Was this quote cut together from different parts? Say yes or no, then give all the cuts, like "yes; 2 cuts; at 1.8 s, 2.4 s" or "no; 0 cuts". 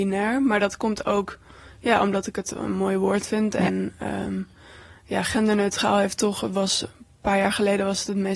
no; 0 cuts